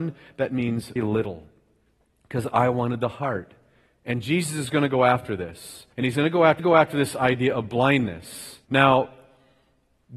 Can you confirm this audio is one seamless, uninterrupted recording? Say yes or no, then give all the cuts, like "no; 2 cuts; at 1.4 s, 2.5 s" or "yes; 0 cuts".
no; 4 cuts; at 1.0 s, 5.9 s, 6.6 s, 8.6 s